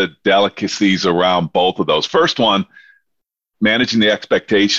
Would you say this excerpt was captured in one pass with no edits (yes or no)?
yes